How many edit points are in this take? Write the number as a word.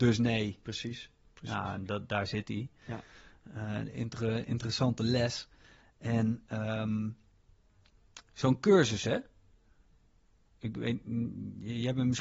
zero